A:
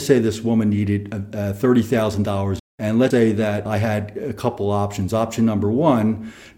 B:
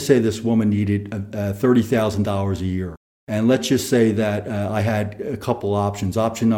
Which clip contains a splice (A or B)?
A